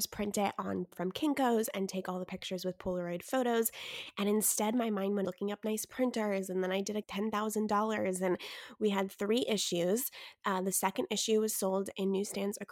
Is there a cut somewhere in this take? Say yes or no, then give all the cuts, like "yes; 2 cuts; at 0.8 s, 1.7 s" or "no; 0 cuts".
yes; 3 cuts; at 0.9 s, 5.2 s, 7.0 s